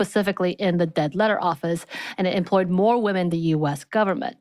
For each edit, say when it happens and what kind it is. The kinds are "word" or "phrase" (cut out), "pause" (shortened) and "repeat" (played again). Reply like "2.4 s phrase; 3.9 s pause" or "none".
3.3 s phrase